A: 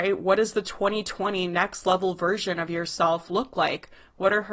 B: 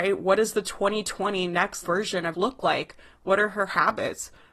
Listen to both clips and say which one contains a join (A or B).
B